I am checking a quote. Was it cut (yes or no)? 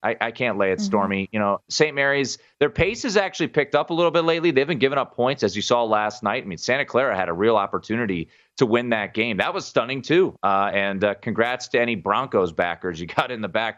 no